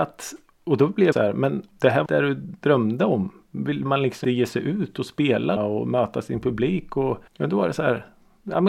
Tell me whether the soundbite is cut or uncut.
cut